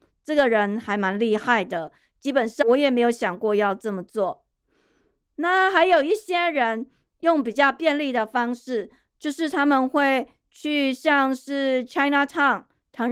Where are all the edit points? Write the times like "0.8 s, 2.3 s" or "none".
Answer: none